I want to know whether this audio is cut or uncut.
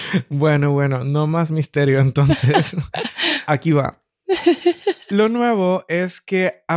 uncut